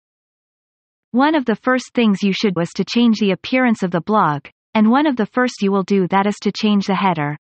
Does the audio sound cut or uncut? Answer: cut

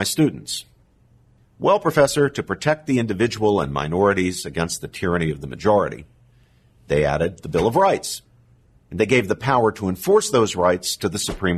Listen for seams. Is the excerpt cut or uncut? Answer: uncut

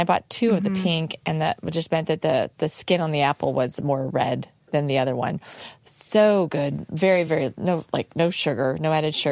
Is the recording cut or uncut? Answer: uncut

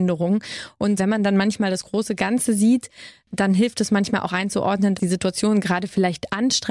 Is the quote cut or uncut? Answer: cut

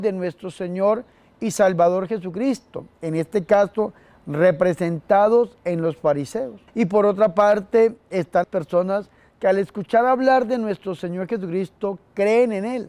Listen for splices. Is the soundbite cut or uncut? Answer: cut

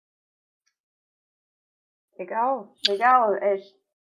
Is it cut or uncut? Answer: cut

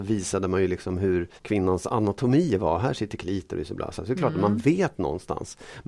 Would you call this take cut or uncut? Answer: cut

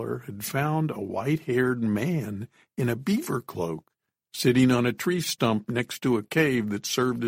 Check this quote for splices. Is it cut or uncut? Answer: uncut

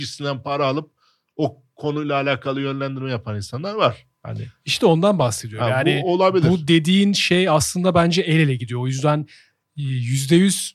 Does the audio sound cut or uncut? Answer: uncut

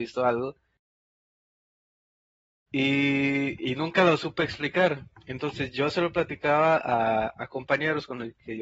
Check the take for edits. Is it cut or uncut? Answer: uncut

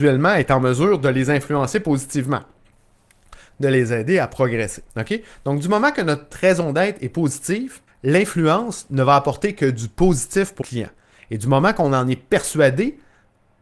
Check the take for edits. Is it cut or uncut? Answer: cut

